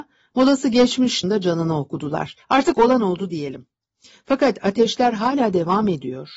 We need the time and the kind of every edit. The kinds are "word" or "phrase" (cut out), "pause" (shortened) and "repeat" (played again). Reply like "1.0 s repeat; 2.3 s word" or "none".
1.2 s phrase; 2.4 s pause